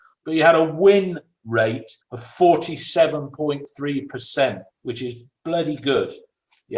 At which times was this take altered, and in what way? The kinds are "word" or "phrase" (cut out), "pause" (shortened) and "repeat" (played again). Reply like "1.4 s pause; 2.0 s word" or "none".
2.0 s pause; 4.7 s pause